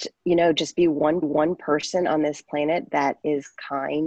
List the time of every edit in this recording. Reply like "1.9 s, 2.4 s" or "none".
1.2 s